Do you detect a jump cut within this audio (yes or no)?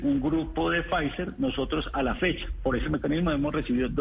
no